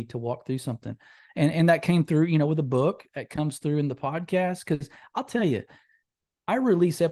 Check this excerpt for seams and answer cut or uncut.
uncut